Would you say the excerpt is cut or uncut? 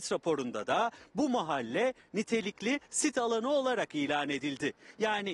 uncut